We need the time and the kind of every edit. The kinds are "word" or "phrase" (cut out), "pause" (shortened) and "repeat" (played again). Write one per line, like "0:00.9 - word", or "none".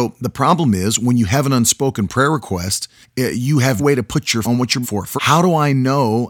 0:03.0 - pause
0:03.8 - word
0:04.4 - word
0:04.8 - word
0:05.2 - word